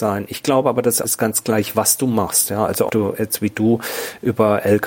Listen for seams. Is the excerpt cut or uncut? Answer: cut